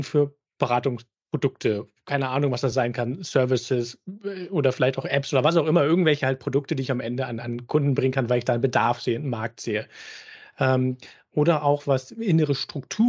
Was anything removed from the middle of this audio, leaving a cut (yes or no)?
no